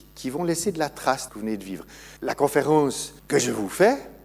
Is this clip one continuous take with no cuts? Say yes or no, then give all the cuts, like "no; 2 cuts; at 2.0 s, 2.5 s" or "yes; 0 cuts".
no; 3 cuts; at 1.3 s, 2.2 s, 3.2 s